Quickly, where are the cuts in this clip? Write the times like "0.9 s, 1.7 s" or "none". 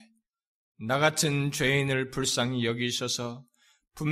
none